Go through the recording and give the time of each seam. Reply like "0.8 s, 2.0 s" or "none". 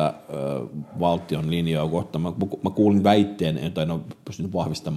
none